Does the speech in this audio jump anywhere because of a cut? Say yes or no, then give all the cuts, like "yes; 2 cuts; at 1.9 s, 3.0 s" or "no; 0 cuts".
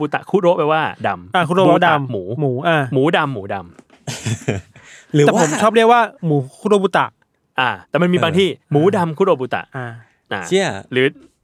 yes; 3 cuts; at 6.2 s, 7.8 s, 8.6 s